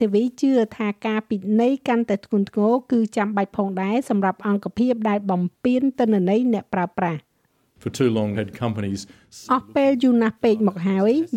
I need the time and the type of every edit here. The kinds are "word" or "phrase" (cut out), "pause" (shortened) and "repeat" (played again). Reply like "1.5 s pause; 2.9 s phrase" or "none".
8.3 s word; 9.5 s word